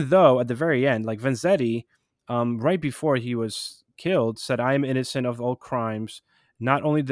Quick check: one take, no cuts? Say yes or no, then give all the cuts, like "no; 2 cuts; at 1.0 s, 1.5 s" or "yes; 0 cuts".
yes; 0 cuts